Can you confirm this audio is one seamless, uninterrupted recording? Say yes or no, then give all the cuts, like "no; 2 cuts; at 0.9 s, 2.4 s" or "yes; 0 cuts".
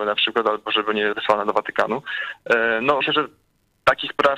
no; 2 cuts; at 1.1 s, 3.0 s